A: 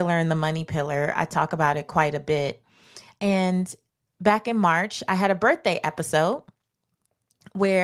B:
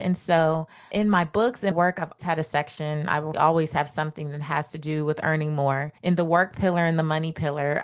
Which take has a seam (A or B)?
B